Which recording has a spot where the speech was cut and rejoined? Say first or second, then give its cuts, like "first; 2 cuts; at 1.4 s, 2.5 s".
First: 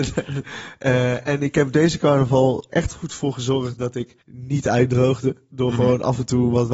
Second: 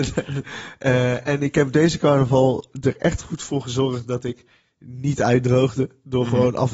first; 2 cuts; at 2.7 s, 4.2 s